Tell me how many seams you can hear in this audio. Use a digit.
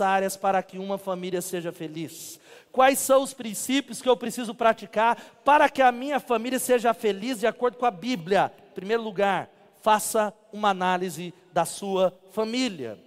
0